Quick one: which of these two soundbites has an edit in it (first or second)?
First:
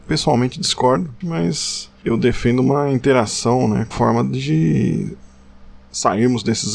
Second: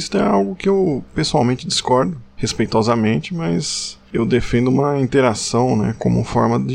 first